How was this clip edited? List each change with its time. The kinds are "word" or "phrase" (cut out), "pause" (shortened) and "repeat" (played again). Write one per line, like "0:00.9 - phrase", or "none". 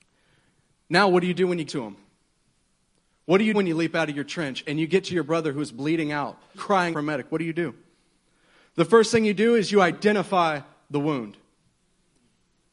0:01.7 - word
0:03.5 - word
0:06.5 - word
0:06.9 - word